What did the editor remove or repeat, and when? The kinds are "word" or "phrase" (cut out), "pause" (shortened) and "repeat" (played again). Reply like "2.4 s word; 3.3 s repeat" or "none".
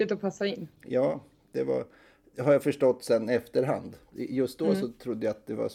none